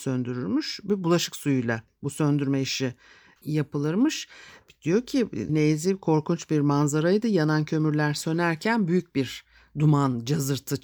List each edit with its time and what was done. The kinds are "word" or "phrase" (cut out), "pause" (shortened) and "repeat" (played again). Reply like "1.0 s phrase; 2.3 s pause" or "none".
5.5 s word